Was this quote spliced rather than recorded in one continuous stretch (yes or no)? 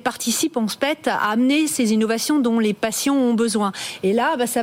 no